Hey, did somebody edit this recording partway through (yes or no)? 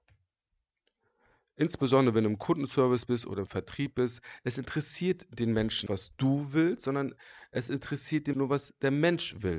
yes